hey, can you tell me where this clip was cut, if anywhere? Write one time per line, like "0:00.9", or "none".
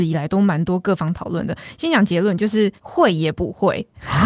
0:02.8